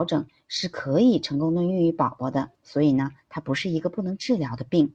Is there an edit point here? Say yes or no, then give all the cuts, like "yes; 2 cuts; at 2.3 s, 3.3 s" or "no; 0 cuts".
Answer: yes; 1 cut; at 2.5 s